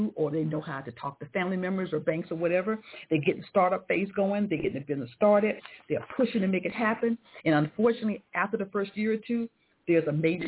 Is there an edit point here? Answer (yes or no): no